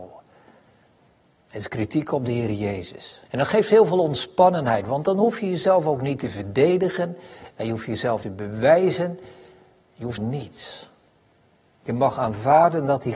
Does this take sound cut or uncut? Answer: cut